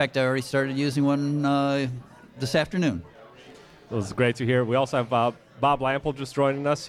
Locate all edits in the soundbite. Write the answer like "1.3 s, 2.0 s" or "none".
none